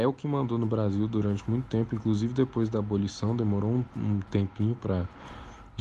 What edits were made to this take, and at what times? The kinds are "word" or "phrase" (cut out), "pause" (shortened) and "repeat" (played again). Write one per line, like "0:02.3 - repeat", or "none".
none